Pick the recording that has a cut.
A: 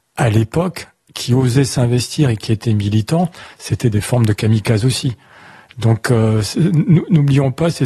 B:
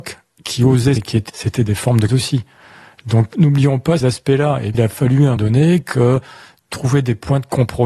B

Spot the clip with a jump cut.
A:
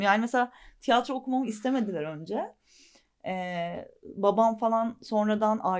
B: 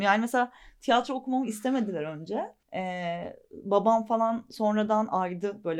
B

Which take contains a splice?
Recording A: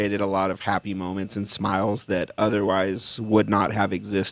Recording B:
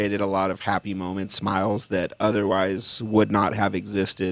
B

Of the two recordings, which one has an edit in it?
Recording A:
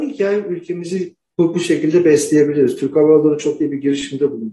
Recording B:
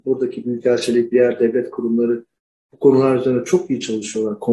B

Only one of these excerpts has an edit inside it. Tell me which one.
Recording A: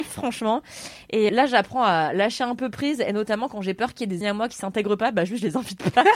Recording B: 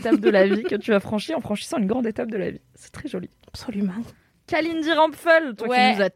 A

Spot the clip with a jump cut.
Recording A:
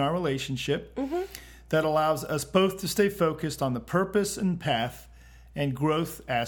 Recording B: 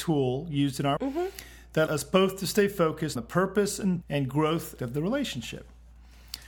B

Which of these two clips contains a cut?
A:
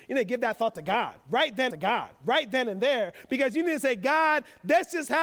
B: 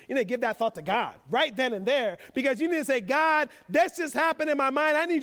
A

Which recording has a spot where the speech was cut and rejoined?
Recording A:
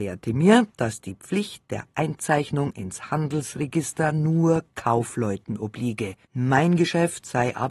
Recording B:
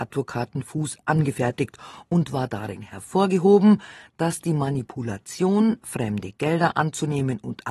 A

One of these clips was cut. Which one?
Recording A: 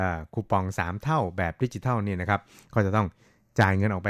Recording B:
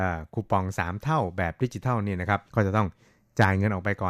B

